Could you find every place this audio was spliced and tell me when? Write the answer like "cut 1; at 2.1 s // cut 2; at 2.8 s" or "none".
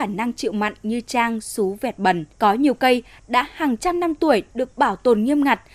cut 1; at 2.3 s